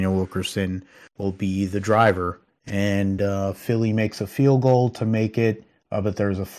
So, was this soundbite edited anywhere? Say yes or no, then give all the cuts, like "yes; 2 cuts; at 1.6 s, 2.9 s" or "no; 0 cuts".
no; 0 cuts